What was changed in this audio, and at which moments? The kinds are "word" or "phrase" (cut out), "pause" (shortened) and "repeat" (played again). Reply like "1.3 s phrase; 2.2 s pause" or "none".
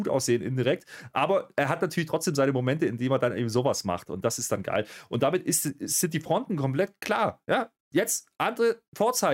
7.8 s pause